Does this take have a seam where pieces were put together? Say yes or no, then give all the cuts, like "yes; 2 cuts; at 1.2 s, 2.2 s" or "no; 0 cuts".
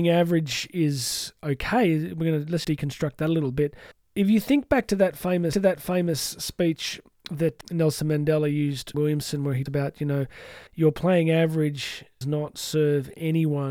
yes; 8 cuts; at 2.6 s, 3.9 s, 5.5 s, 7.6 s, 8.9 s, 9.7 s, 10.7 s, 12.2 s